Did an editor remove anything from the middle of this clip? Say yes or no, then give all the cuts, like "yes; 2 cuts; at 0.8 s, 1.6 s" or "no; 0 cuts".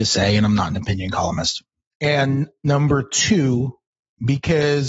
no; 0 cuts